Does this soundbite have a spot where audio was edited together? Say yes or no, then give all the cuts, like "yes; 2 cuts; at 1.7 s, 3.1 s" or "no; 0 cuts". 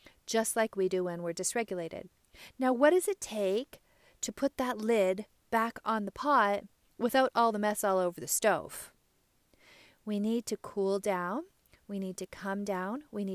no; 0 cuts